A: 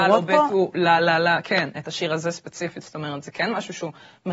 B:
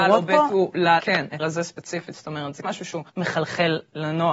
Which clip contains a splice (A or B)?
B